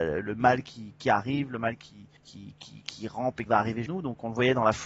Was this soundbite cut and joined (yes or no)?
yes